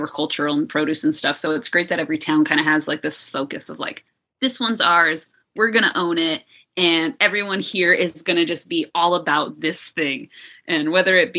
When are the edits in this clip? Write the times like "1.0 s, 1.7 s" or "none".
none